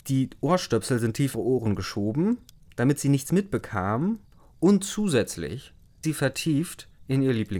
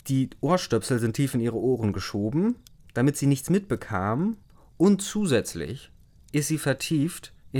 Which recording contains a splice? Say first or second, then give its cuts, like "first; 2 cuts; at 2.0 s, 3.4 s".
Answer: first; 2 cuts; at 1.3 s, 6.0 s